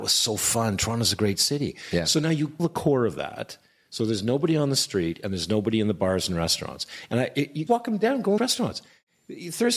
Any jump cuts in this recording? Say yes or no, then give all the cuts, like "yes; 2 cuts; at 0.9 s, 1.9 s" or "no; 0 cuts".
yes; 3 cuts; at 2.6 s, 7.7 s, 8.4 s